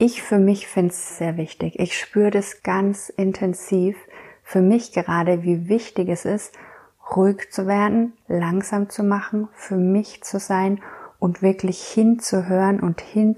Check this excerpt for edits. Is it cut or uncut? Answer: cut